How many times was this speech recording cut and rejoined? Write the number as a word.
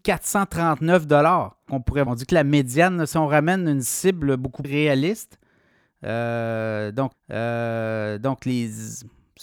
four